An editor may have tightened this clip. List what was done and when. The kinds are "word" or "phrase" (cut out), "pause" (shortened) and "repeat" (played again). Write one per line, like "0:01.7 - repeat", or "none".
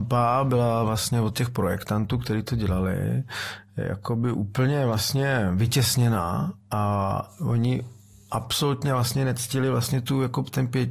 0:06.6 - word